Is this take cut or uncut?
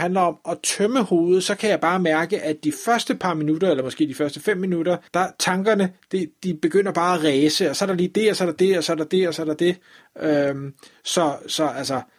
cut